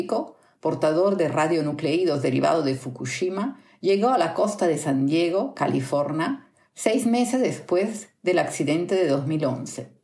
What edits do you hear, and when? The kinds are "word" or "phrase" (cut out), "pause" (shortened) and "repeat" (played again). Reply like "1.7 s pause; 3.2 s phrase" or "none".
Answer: none